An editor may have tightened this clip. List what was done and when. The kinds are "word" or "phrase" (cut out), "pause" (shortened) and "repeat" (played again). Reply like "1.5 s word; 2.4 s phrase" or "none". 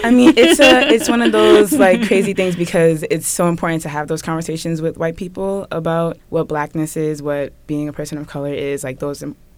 6.2 s pause